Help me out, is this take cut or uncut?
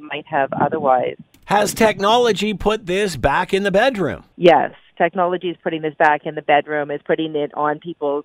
cut